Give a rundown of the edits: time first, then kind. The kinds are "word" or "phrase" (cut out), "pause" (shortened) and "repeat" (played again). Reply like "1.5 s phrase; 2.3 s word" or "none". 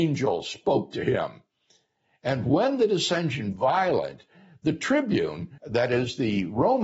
3.5 s word; 5.6 s pause